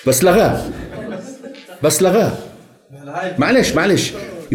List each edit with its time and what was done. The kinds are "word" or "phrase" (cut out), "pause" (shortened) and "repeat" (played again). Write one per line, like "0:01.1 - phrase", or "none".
none